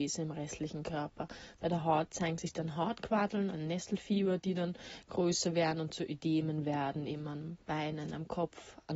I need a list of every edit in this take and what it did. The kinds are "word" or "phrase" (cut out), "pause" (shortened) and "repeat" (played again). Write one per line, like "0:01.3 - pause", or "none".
0:03.5 - word